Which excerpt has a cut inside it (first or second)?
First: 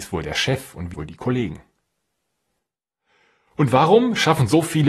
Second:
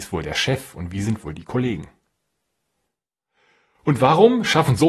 first